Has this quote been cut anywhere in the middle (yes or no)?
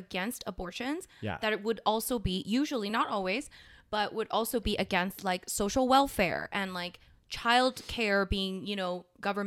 no